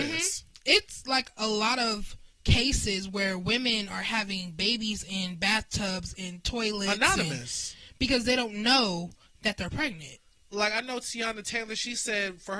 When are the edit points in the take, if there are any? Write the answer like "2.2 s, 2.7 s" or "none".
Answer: none